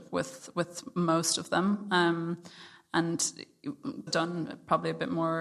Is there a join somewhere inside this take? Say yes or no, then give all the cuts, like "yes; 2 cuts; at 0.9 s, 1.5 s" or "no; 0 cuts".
yes; 1 cut; at 4.1 s